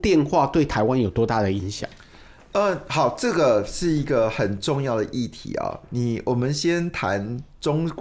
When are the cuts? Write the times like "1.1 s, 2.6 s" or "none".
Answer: none